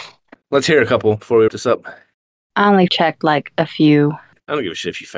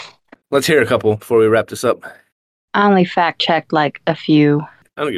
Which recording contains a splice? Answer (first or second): first